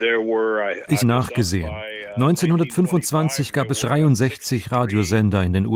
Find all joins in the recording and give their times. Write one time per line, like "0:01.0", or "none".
0:01.0
0:03.8